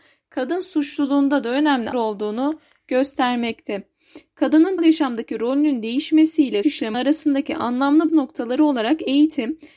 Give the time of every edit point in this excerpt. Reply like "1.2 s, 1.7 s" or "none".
1.9 s, 4.8 s, 6.6 s, 6.9 s, 8.1 s